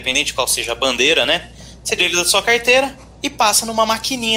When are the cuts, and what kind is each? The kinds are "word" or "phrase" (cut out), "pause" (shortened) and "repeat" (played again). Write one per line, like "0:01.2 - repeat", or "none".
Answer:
0:02.0 - word
0:03.1 - pause